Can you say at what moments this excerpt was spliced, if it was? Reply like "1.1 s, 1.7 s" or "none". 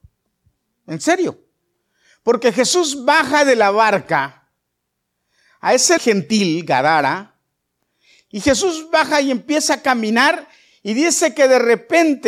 6.0 s